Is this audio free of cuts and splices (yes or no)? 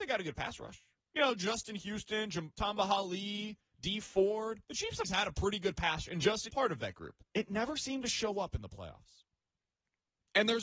no